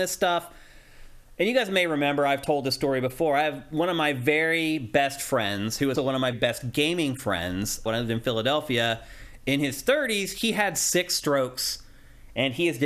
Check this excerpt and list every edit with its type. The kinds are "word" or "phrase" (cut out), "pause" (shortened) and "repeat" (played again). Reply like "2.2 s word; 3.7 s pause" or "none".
6.0 s word; 6.3 s word; 7.9 s word

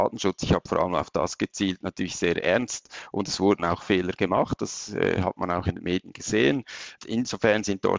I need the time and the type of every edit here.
none

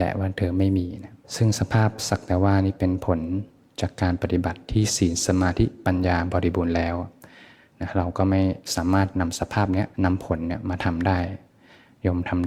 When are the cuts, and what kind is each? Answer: 1.2 s pause; 9.9 s pause

